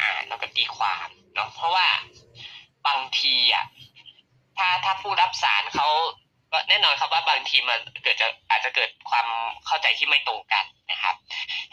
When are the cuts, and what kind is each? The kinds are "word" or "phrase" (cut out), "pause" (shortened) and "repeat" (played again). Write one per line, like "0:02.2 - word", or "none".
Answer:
0:06.3 - pause